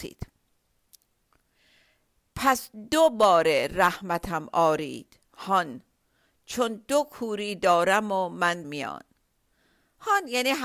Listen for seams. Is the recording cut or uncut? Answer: cut